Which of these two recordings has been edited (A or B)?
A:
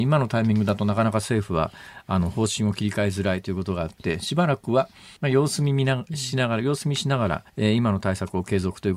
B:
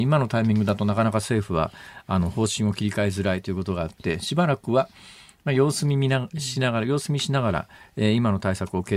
A